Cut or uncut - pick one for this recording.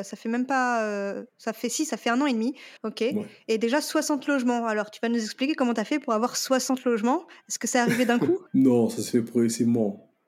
cut